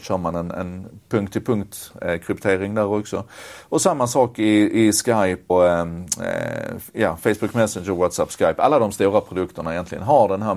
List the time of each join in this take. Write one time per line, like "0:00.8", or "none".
0:05.5